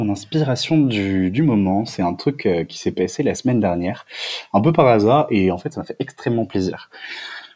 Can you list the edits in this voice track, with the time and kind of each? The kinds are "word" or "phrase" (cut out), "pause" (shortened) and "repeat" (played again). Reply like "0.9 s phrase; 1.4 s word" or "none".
none